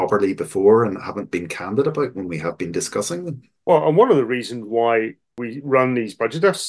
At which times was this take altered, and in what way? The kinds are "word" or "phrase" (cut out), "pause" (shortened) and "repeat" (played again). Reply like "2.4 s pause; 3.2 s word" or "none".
none